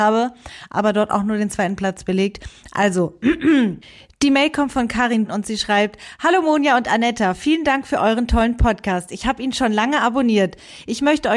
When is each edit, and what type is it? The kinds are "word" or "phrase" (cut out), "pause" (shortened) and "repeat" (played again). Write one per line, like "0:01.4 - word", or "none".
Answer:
none

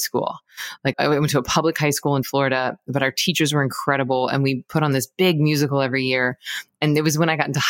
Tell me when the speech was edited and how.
0:00.9 - word
0:02.2 - word

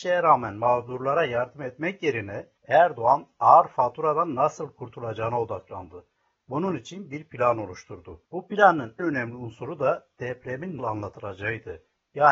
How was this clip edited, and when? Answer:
0:02.6 - pause
0:08.3 - pause
0:09.0 - word
0:10.8 - word

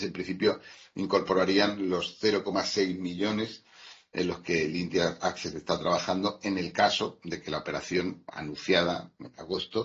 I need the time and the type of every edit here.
none

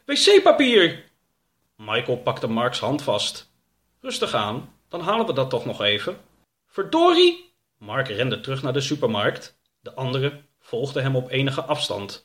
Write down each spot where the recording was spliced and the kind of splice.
none

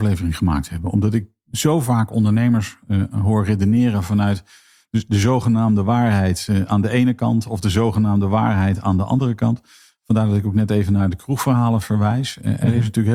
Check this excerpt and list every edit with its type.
none

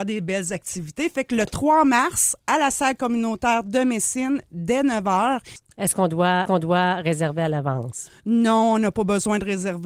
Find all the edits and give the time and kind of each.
0:06.5 - repeat

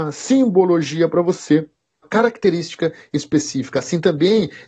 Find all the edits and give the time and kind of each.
0:02.0 - phrase

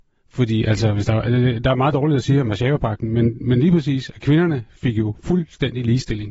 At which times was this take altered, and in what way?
none

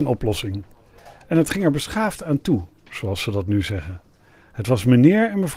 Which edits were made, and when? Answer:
none

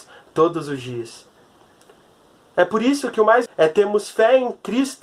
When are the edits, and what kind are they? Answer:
0:03.5 - word

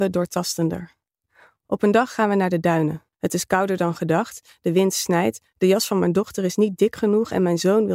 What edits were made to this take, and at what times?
0:03.1 - pause

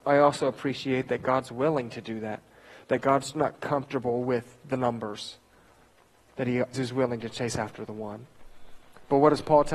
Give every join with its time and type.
0:03.3 - word
0:06.7 - word

